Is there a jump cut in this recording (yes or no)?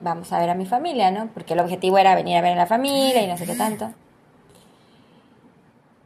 no